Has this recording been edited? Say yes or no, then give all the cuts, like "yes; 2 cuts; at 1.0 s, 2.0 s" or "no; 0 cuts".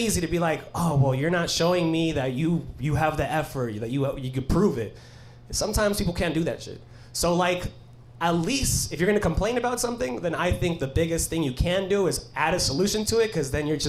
no; 0 cuts